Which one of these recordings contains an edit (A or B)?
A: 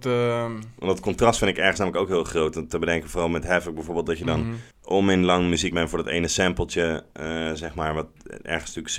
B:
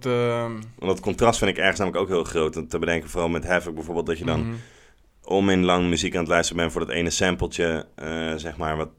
A